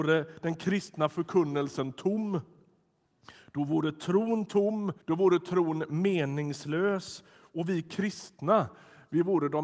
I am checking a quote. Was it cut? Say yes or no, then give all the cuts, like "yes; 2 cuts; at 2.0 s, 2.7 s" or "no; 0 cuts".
yes; 1 cut; at 5.0 s